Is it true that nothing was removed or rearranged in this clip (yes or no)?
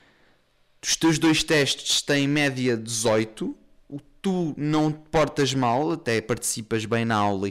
yes